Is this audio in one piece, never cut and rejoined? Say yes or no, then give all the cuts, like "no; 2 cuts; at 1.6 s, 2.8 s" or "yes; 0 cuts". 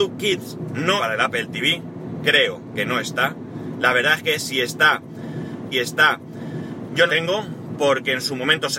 no; 3 cuts; at 1.0 s, 5.7 s, 7.1 s